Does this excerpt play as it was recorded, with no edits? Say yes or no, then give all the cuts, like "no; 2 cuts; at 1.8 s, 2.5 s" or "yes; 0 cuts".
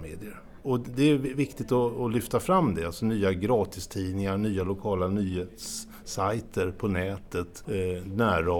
yes; 0 cuts